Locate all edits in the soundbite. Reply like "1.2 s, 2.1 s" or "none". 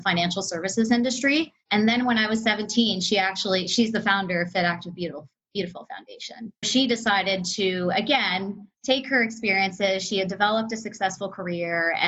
6.6 s, 8.7 s